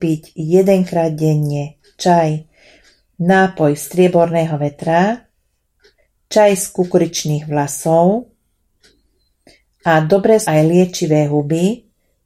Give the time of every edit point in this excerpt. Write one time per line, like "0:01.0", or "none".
0:10.4